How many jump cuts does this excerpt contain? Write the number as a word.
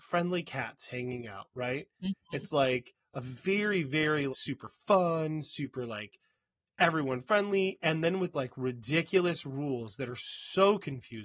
two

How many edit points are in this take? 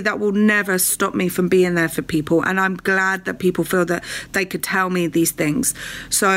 zero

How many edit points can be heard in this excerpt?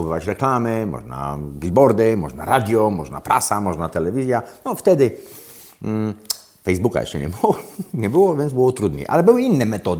zero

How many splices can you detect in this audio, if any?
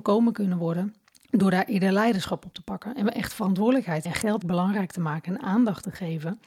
three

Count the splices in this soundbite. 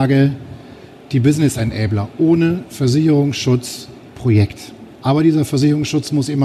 two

